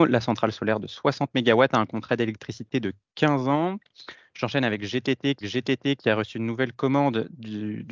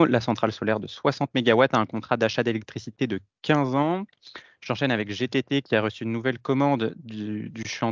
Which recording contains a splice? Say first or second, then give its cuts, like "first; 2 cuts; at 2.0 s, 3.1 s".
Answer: first; 2 cuts; at 2.1 s, 5.4 s